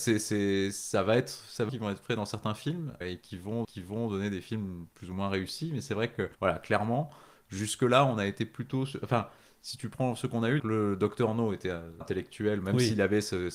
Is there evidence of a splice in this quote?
yes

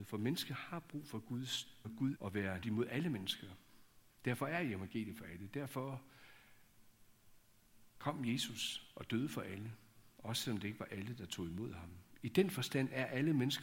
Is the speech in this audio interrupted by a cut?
yes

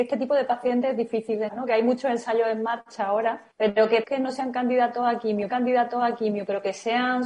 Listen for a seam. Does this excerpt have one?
yes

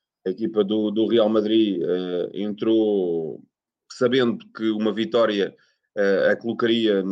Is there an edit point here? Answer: no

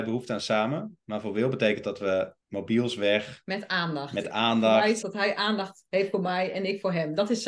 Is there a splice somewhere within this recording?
yes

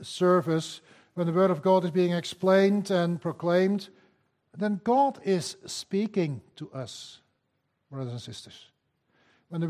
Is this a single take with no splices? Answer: yes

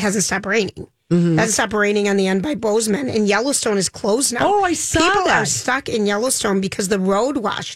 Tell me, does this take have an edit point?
no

